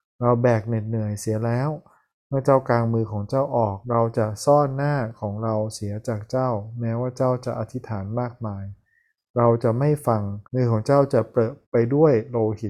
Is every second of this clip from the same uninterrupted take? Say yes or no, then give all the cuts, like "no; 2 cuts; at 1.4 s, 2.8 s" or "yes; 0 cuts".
no; 3 cuts; at 3.8 s, 10.4 s, 11.6 s